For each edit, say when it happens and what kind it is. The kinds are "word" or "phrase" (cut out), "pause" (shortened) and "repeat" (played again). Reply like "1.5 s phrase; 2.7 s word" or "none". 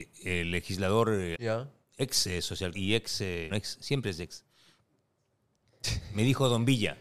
1.3 s word; 2.7 s word; 3.5 s word